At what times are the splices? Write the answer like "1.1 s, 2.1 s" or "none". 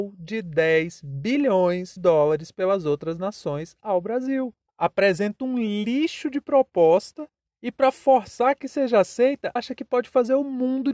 2.0 s, 9.6 s

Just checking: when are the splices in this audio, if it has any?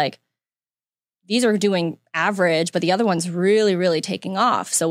none

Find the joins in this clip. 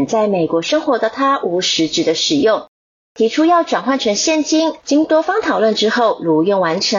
none

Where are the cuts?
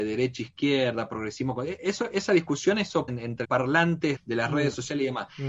3.1 s, 3.4 s, 4.2 s

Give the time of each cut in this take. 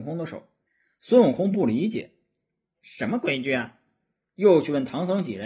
none

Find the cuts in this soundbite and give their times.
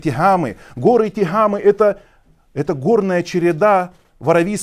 none

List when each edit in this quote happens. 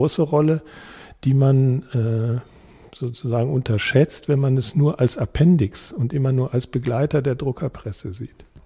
none

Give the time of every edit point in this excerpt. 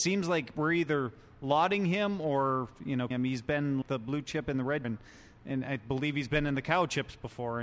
3.1 s, 3.8 s, 4.8 s

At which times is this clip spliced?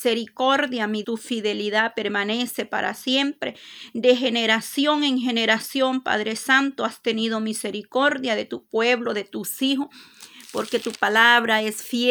1.0 s

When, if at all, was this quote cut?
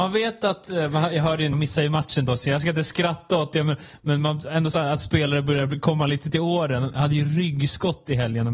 1.5 s

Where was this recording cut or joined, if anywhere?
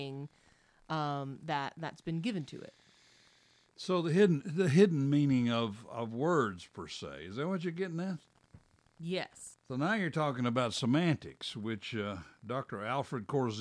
none

